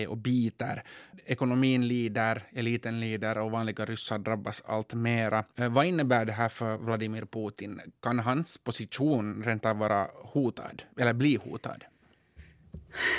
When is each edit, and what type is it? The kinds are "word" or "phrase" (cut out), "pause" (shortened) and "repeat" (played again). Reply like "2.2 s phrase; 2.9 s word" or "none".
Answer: 5.5 s pause; 10.9 s pause